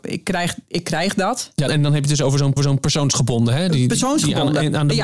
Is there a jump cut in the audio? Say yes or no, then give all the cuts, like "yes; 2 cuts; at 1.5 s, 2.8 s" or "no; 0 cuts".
yes; 2 cuts; at 1.7 s, 2.6 s